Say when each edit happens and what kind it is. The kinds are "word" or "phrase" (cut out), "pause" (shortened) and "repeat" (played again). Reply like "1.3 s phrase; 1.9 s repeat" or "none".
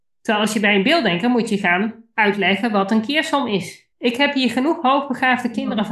3.9 s pause